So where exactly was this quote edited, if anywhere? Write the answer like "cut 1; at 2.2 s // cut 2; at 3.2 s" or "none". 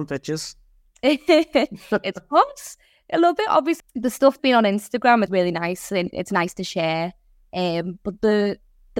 cut 1; at 3.8 s // cut 2; at 4.4 s // cut 3; at 5.3 s